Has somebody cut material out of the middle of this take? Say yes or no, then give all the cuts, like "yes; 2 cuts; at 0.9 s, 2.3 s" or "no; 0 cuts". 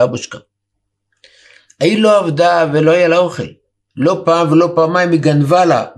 no; 0 cuts